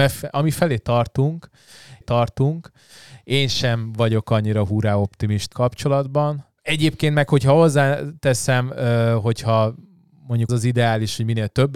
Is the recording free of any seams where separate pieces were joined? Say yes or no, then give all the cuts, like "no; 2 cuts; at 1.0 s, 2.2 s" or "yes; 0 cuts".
no; 4 cuts; at 2.0 s, 5.5 s, 6.6 s, 10.5 s